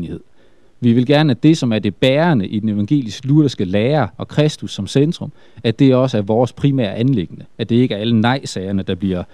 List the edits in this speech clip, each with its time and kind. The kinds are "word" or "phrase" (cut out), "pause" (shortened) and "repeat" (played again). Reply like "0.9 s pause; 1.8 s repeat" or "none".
7.5 s pause